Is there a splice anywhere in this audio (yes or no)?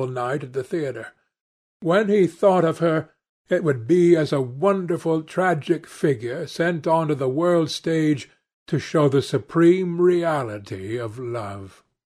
no